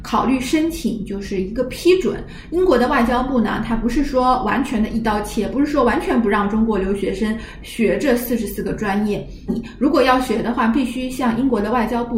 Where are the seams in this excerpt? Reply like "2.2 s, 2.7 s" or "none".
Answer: 9.5 s